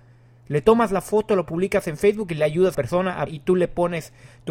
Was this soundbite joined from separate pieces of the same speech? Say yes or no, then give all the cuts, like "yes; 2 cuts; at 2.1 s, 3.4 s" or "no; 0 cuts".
yes; 2 cuts; at 2.7 s, 3.3 s